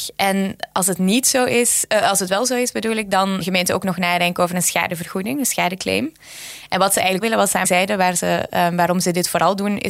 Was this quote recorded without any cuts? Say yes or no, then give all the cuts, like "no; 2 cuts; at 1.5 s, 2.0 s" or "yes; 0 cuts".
no; 3 cuts; at 3.4 s, 7.2 s, 7.6 s